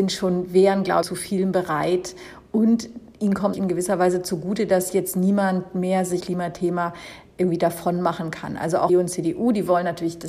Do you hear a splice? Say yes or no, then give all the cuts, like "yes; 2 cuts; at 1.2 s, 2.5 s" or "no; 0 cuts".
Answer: yes; 4 cuts; at 1.0 s, 3.5 s, 6.2 s, 8.9 s